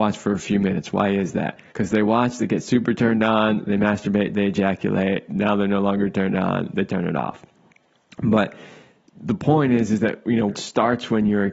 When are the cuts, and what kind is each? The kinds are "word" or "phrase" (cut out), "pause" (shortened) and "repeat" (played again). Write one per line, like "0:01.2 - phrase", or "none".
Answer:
0:01.7 - pause
0:10.5 - word